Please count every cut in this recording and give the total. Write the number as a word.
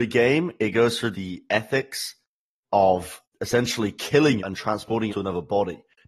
four